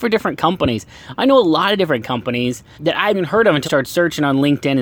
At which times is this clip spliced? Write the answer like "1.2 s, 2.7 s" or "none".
2.8 s, 3.1 s, 3.6 s